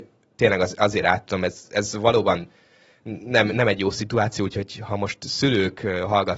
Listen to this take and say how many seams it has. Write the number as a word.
zero